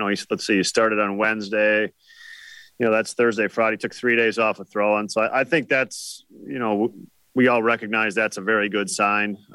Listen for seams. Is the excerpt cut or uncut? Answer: uncut